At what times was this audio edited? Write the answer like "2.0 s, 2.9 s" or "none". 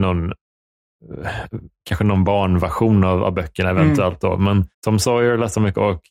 4.7 s

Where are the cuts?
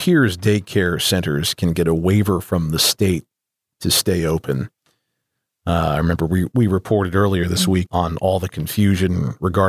7.9 s

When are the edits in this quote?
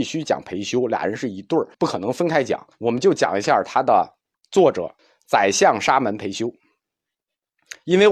1.7 s, 2.7 s, 4.3 s, 5.0 s

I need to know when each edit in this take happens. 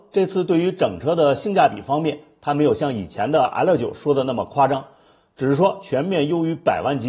none

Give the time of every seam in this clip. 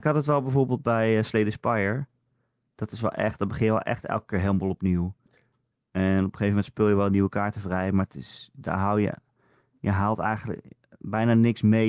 none

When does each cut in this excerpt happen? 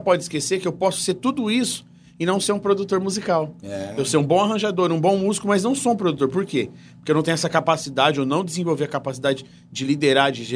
none

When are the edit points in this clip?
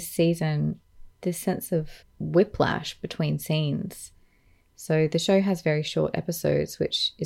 1.2 s, 2.0 s

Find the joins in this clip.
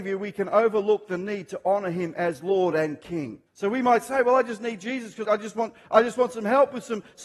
3.5 s, 5.2 s

